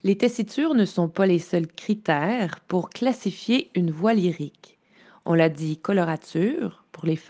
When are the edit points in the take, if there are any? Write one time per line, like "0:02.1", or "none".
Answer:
none